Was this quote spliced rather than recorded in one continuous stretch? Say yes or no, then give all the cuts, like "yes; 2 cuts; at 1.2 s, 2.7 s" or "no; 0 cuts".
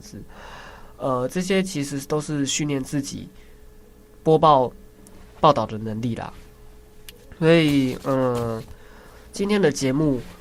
no; 0 cuts